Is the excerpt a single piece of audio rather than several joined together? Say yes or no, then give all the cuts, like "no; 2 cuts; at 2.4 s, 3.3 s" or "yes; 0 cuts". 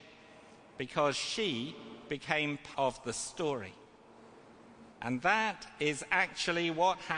no; 2 cuts; at 2.7 s, 4.9 s